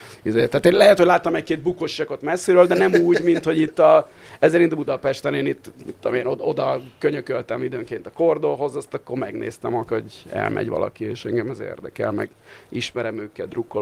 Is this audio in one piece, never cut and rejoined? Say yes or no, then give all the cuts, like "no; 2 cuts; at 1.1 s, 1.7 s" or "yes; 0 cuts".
yes; 0 cuts